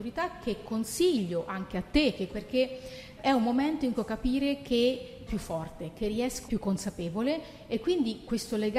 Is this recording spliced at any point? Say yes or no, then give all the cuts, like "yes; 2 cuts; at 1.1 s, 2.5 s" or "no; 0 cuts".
yes; 5 cuts; at 2.3 s, 3.2 s, 3.9 s, 5.3 s, 6.5 s